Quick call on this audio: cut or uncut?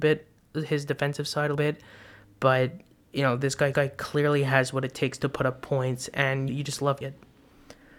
cut